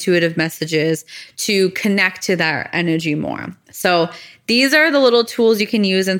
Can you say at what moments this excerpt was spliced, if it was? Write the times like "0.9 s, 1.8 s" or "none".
none

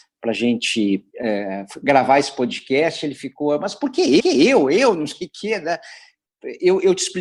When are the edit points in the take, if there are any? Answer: 1.1 s, 4.2 s

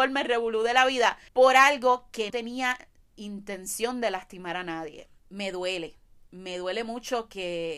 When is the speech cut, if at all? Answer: 1.3 s, 2.3 s, 5.2 s

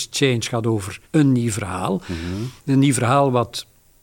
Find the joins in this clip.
1.1 s, 2.6 s

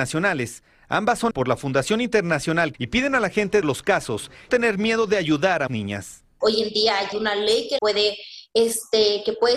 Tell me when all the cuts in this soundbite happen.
1.3 s, 2.7 s, 3.6 s, 4.5 s, 5.7 s, 7.1 s, 7.8 s

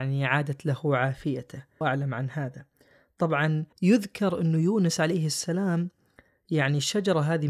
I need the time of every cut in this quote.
1.8 s, 3.7 s

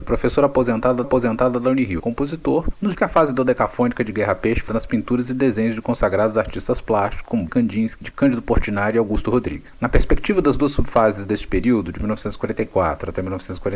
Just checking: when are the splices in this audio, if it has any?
1.0 s, 2.0 s, 2.9 s, 4.7 s, 7.5 s, 8.1 s

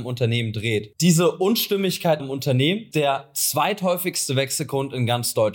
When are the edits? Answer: 2.2 s, 2.9 s

